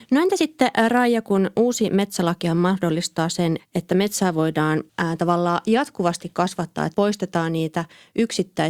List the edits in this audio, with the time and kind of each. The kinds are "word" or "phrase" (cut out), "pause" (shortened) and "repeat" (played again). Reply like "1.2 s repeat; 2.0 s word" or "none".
3.6 s word; 4.9 s pause; 6.9 s word